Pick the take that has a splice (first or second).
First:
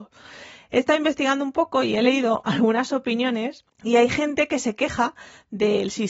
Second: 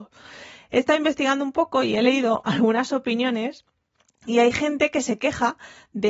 first